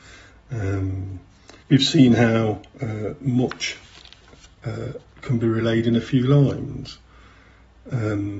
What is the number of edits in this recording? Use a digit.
2